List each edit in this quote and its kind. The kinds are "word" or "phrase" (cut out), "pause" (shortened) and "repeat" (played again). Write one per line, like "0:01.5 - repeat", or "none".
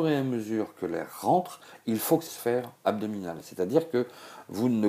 0:02.3 - phrase

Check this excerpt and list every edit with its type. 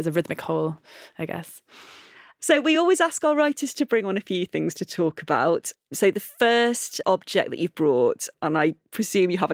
none

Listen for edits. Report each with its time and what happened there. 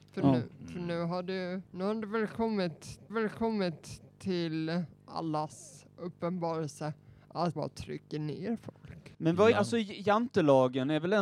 0:01.7 - pause
0:03.1 - repeat
0:07.6 - word
0:09.1 - pause
0:09.5 - word

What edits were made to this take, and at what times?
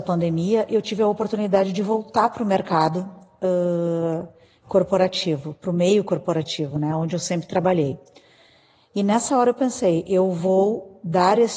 none

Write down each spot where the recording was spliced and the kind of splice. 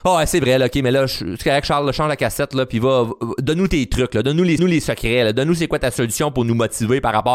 0:04.6 - repeat

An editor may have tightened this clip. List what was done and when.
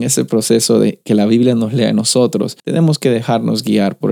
0:02.6 - pause

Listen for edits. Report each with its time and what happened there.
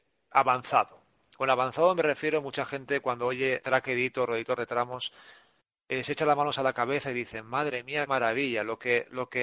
0:03.6 - word
0:08.1 - word

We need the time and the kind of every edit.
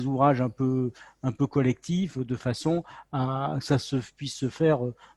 none

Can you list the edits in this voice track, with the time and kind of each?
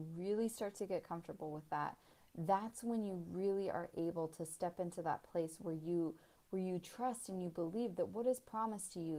none

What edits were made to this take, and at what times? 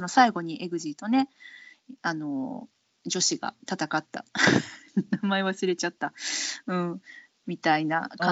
none

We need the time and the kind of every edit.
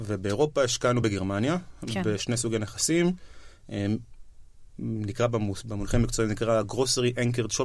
none

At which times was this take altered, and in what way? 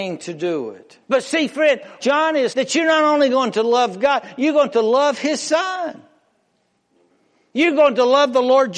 0:01.0 - pause
0:02.0 - word
0:02.5 - word

